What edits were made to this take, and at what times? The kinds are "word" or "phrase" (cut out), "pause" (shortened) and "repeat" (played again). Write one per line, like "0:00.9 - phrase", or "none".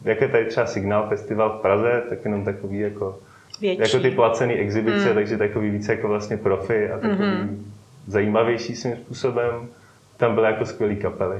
none